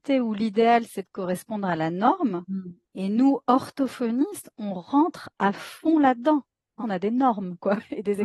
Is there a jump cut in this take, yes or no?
yes